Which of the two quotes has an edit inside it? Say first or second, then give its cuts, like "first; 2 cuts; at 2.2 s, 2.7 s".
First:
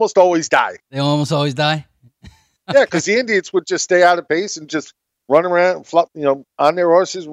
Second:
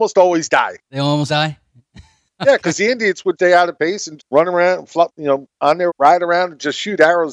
second; 4 cuts; at 1.3 s, 3.4 s, 4.2 s, 5.9 s